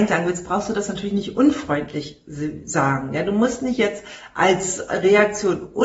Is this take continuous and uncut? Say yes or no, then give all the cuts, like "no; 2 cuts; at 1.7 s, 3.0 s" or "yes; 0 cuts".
yes; 0 cuts